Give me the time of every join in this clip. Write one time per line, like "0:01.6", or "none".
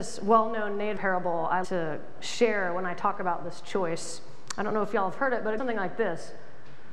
0:01.0
0:01.6
0:05.6